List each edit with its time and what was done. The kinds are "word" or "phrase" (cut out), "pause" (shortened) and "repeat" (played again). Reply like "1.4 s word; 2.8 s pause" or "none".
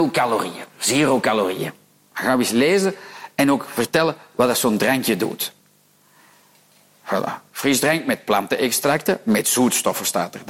none